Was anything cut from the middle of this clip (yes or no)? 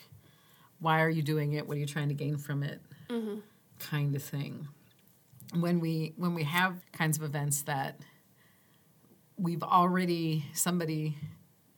yes